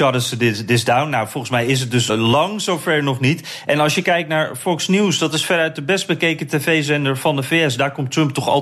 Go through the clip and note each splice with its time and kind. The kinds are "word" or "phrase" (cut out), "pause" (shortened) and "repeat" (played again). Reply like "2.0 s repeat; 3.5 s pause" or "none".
2.1 s word

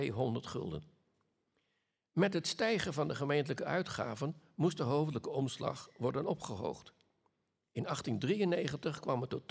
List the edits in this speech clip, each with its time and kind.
none

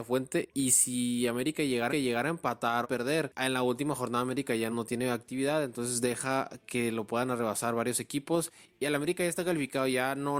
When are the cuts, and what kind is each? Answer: 1.9 s repeat; 2.8 s phrase; 4.7 s word

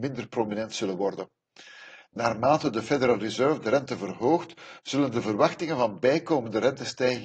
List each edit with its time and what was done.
none

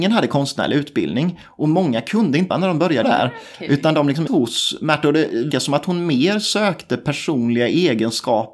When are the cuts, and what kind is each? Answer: 2.5 s word; 3.0 s word; 4.3 s word; 5.5 s word

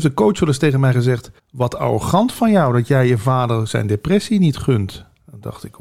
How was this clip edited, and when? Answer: 1.4 s pause

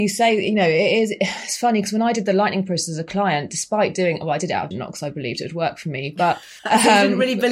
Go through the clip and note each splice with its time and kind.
4.7 s word; 6.6 s pause

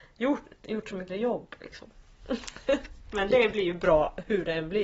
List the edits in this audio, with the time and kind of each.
1.1 s word

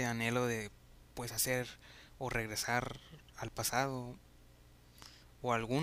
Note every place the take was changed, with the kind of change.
1.1 s pause

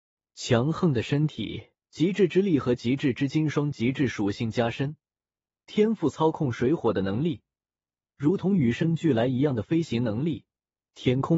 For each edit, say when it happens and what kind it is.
1.8 s pause

